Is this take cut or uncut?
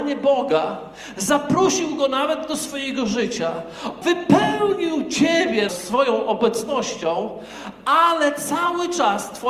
cut